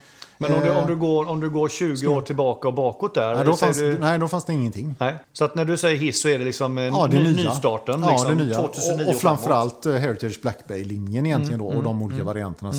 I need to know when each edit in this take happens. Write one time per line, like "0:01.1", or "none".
0:05.2